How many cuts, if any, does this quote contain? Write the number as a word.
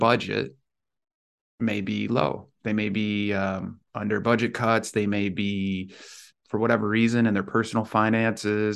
two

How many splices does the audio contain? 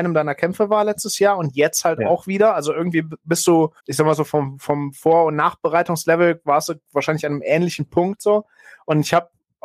one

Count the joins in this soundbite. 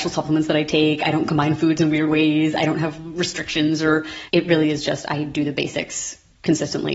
one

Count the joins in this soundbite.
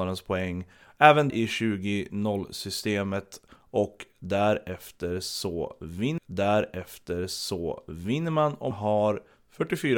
three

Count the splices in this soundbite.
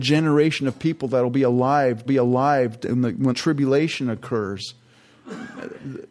two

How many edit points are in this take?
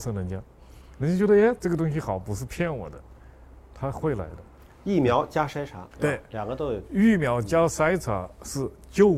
one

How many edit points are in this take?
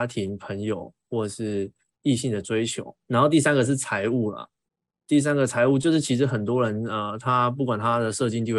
one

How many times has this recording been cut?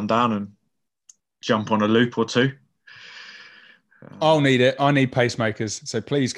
zero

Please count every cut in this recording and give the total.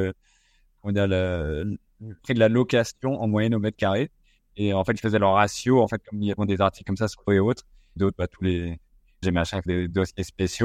six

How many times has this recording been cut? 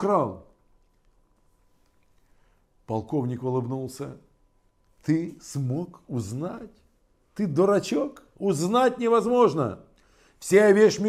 zero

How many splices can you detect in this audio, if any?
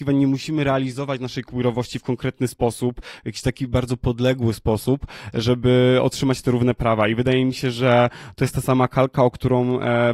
zero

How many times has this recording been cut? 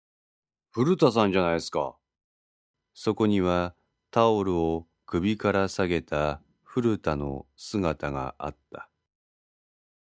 zero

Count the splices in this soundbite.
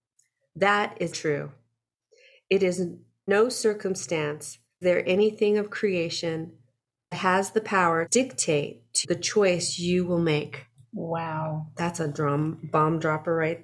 six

